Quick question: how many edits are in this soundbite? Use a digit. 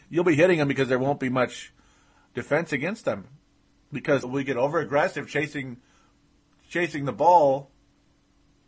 1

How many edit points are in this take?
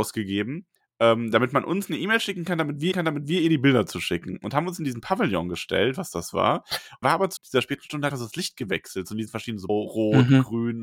5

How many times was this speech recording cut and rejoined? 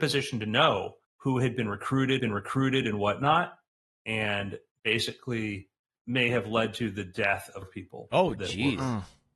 4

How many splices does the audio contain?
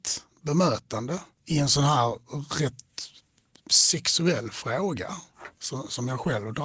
1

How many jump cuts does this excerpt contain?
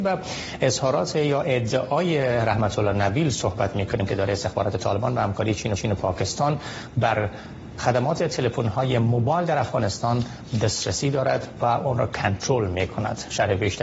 2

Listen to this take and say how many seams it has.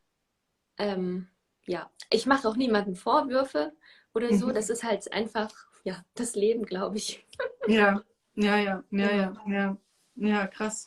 0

